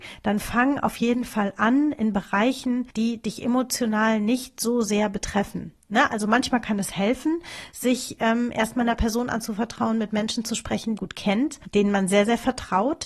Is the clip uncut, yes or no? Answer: no